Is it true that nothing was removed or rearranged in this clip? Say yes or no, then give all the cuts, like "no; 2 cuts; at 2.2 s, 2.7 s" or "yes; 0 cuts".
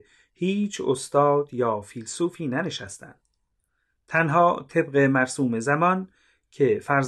yes; 0 cuts